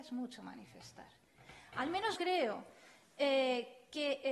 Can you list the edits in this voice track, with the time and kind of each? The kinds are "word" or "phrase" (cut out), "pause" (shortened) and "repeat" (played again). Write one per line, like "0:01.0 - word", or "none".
0:02.2 - word

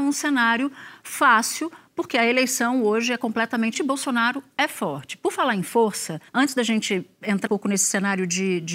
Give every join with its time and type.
0:03.7 - word
0:06.3 - pause
0:07.5 - word

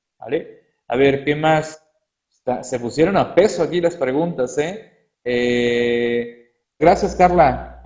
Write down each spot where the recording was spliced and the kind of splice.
0:06.8 - word

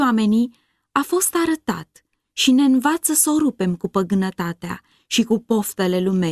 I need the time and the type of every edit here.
none

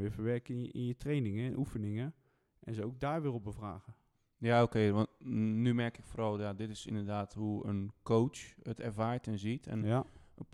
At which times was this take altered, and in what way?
none

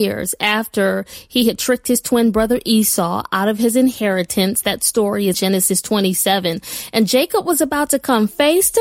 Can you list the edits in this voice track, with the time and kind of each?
0:05.3 - word

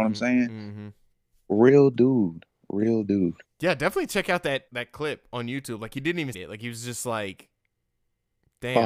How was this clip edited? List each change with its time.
0:03.4 - pause
0:04.7 - word
0:06.3 - word

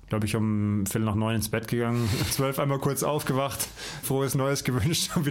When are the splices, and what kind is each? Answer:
0:02.3 - word
0:04.0 - word

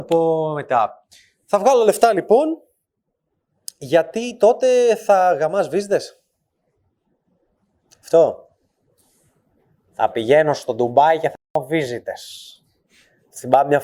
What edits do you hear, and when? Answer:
0:11.4 - pause

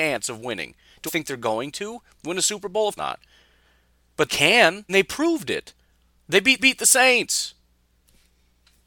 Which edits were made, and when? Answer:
0:01.1 - word
0:03.0 - word
0:04.3 - word
0:04.9 - word
0:06.6 - repeat

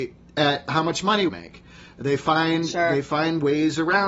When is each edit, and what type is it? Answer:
0:01.3 - word

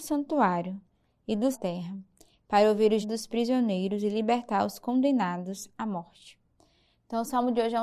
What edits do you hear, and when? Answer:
0:01.5 - phrase
0:03.0 - word

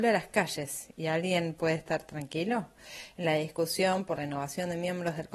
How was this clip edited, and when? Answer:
0:04.2 - word

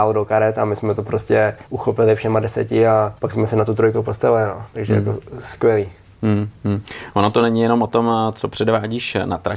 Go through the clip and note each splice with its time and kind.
0:01.7 - pause
0:03.2 - pause

